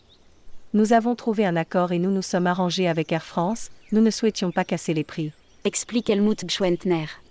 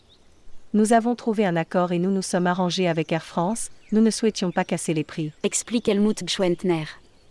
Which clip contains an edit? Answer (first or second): second